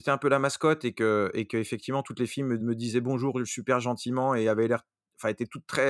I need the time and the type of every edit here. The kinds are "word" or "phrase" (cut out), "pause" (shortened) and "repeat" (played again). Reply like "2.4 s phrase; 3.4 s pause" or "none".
2.6 s word

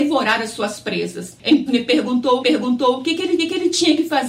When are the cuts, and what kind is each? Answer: 1.7 s word; 2.4 s repeat; 3.4 s repeat

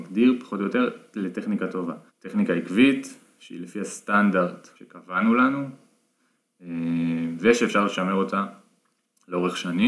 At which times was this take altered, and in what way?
2.1 s pause; 4.8 s pause

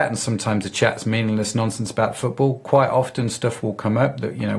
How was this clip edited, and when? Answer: none

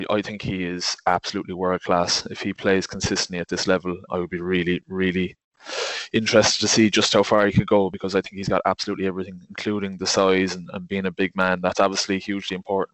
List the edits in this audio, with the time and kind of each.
4.1 s word

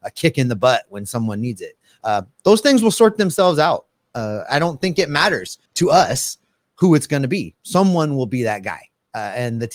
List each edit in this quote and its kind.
5.7 s pause

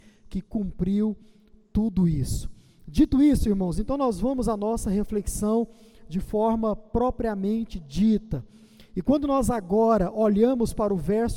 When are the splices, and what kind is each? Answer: none

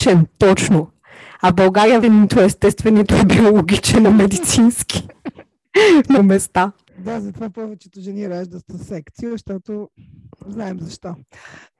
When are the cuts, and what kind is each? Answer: 2.0 s word; 4.1 s word; 6.2 s word

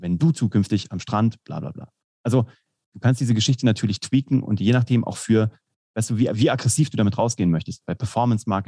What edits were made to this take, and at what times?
none

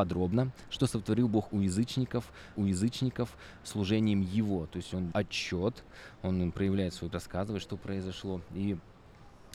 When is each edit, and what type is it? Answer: 2.5 s repeat; 5.1 s word; 7.1 s phrase

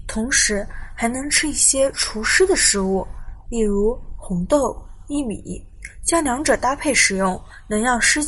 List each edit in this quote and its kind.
none

